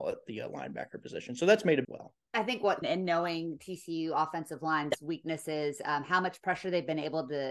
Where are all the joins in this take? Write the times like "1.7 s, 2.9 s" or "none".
1.8 s, 2.2 s, 2.8 s